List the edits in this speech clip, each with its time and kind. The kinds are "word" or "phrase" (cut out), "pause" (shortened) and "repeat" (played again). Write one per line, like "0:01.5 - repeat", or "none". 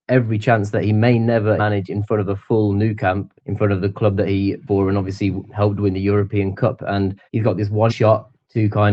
0:01.6 - word
0:03.4 - pause
0:04.7 - word
0:07.3 - pause
0:07.9 - word